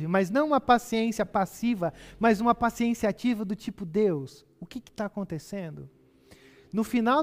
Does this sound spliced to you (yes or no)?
no